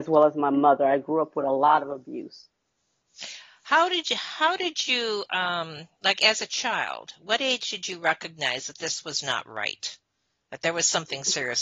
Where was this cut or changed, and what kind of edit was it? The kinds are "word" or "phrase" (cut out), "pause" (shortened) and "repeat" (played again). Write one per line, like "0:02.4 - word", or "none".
none